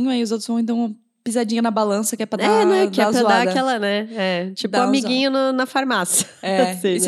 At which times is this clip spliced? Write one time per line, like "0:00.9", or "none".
none